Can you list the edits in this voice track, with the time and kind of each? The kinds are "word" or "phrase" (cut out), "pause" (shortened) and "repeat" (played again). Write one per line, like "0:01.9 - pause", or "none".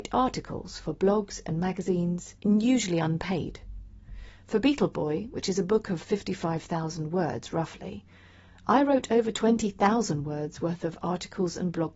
0:02.4 - pause